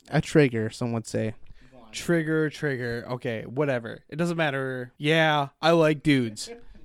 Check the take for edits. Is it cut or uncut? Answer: cut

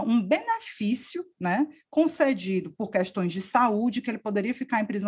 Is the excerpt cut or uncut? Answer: uncut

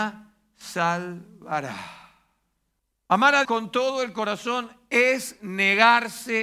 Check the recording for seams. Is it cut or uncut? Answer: cut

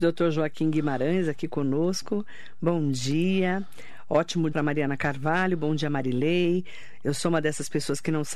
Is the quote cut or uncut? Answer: cut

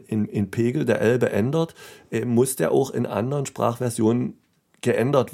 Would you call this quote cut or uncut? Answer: uncut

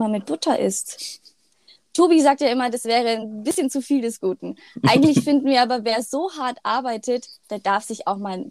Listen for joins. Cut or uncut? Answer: uncut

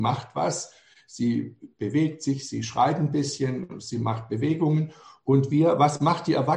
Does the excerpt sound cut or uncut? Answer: uncut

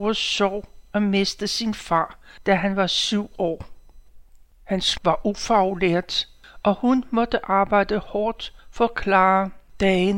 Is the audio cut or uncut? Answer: cut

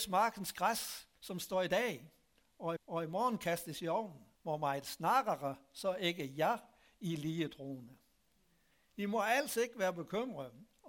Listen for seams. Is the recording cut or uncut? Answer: cut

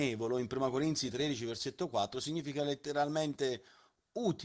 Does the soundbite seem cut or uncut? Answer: uncut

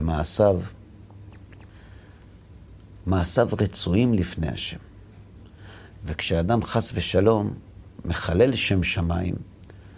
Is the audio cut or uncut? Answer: uncut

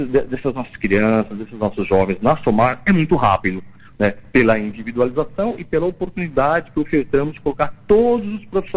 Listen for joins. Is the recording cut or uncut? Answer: uncut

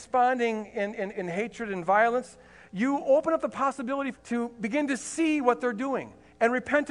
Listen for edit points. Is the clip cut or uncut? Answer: cut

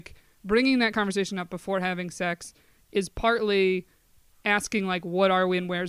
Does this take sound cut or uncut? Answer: cut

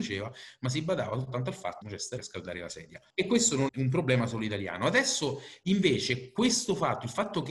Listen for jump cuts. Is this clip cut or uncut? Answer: cut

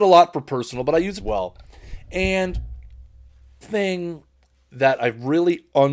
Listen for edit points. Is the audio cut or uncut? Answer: cut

